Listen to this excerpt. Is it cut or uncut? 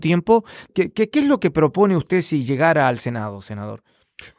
uncut